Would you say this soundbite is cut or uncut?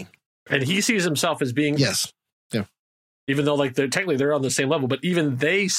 cut